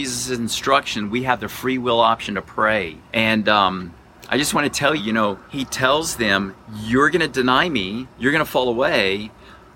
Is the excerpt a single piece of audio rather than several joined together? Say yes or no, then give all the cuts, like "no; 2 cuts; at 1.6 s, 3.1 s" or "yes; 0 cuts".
no; 3 cuts; at 3.0 s, 5.0 s, 5.4 s